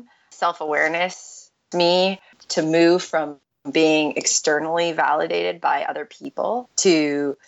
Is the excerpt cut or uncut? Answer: cut